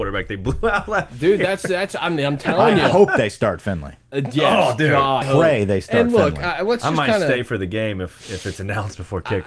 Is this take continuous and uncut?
no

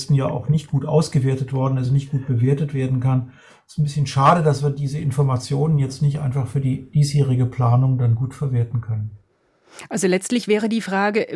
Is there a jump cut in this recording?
no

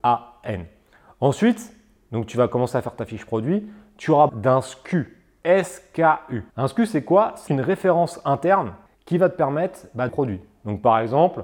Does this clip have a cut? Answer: yes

